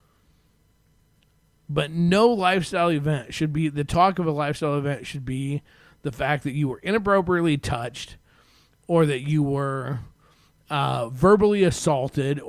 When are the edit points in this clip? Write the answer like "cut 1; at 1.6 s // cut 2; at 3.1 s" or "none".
none